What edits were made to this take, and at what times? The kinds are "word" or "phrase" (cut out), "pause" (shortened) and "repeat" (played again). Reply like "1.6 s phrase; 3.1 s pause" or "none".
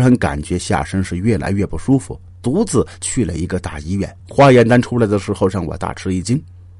2.3 s pause; 4.2 s pause